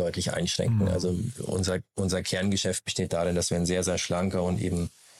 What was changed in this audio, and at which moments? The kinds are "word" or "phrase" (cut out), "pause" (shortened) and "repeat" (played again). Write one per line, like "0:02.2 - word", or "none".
none